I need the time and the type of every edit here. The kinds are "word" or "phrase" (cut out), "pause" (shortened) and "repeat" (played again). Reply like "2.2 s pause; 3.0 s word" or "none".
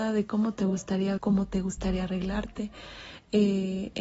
1.2 s word